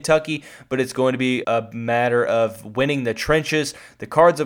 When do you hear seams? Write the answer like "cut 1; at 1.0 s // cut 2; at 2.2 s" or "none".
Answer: cut 1; at 1.4 s